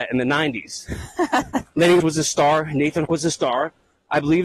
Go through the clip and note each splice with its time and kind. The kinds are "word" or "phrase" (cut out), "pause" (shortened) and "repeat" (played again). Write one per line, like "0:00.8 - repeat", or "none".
0:02.0 - word
0:03.1 - word